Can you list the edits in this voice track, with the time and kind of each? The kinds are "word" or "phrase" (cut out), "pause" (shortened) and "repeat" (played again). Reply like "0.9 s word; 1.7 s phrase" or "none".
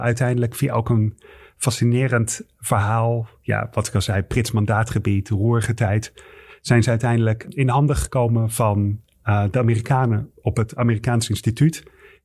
none